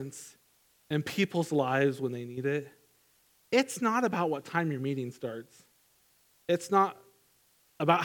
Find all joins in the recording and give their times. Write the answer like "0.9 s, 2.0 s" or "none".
none